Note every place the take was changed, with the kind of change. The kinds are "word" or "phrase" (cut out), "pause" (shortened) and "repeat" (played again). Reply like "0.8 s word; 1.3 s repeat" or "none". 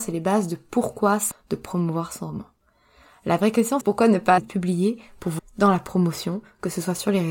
1.3 s word; 3.8 s word; 4.4 s word; 5.4 s word